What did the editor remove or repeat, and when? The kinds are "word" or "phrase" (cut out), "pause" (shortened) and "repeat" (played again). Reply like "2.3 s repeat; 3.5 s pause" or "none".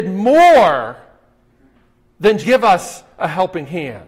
2.4 s word